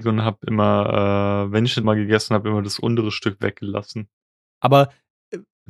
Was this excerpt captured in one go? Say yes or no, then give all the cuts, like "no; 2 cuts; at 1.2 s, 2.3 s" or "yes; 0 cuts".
no; 1 cut; at 1.8 s